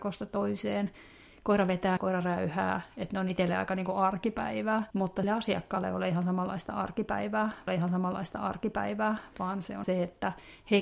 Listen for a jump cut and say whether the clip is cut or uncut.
cut